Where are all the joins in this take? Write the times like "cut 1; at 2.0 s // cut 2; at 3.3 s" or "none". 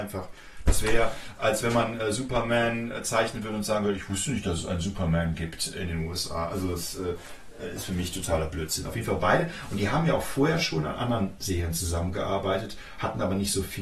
none